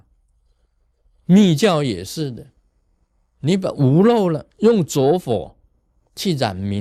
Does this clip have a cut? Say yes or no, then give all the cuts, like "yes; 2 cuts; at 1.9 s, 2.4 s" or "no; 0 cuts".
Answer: yes; 1 cut; at 4.5 s